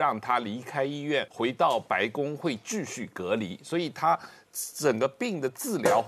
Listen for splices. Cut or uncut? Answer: cut